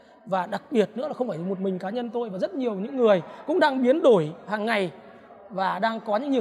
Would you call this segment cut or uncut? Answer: uncut